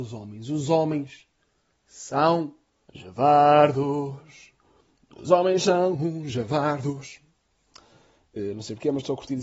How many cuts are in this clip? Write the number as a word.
one